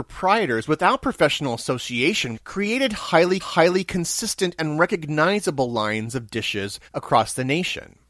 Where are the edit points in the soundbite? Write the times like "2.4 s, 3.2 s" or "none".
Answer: 2.3 s, 3.4 s, 6.9 s